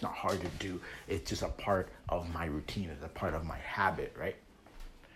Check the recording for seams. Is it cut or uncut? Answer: uncut